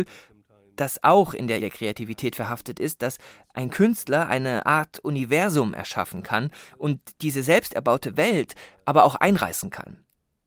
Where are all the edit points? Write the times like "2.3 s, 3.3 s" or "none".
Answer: 1.6 s